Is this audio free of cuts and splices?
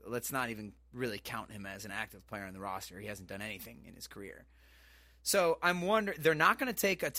yes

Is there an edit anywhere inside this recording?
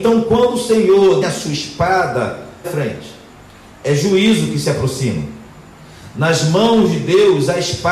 yes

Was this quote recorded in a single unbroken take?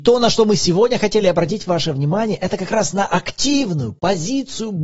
yes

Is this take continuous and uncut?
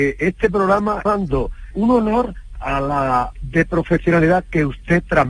no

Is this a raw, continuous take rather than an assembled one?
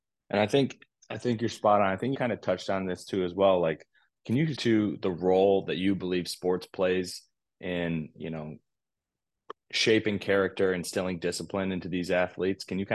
no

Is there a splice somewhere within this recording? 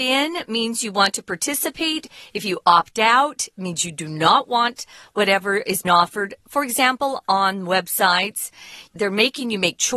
yes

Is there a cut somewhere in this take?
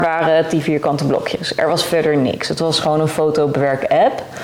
no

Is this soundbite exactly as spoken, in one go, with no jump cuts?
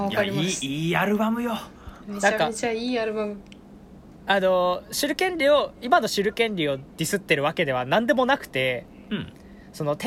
no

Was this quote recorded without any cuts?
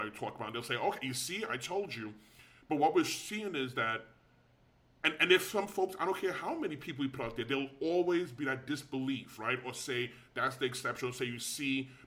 yes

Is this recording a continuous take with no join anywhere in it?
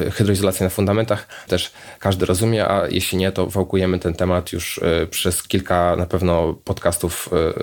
no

